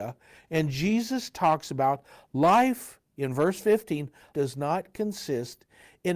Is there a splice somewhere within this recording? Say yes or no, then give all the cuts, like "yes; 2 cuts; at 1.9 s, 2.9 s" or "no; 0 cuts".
yes; 1 cut; at 4.3 s